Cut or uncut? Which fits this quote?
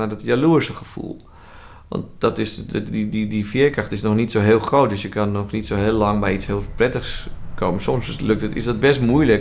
uncut